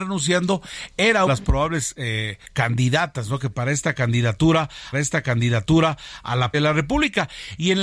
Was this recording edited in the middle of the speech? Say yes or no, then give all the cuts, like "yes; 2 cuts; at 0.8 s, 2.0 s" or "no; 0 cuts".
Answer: yes; 5 cuts; at 1.3 s, 2.4 s, 3.5 s, 4.9 s, 6.5 s